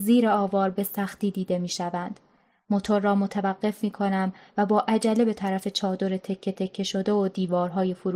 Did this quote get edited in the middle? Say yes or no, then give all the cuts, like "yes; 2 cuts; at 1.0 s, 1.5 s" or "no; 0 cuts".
no; 0 cuts